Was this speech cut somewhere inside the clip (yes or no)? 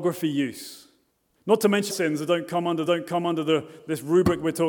yes